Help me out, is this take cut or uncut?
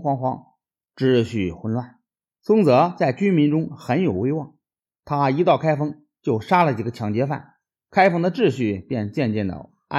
uncut